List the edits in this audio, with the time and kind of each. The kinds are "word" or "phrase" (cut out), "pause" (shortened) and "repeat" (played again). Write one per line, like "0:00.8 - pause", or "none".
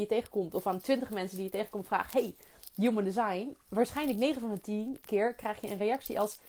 none